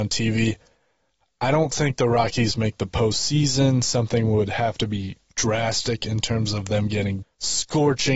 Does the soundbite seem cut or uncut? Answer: cut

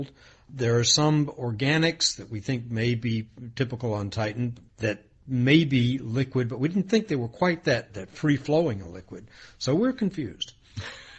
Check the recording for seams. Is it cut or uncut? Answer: uncut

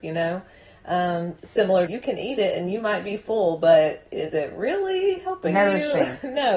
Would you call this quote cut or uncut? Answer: cut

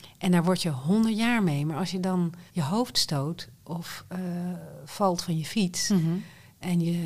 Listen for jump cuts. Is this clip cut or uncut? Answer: cut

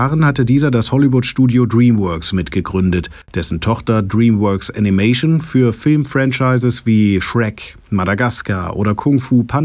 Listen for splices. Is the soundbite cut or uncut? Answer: cut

